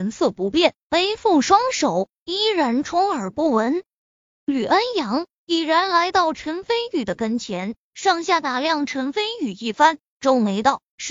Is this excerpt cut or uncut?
cut